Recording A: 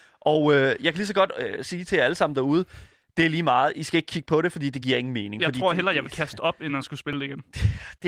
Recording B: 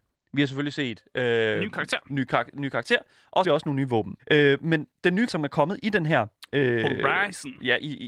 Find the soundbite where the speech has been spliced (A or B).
B